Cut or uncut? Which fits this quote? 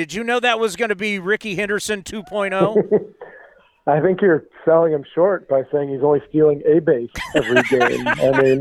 uncut